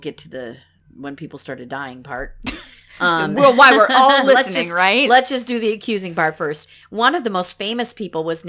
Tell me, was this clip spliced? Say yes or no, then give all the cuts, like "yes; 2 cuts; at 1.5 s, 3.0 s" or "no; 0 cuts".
no; 0 cuts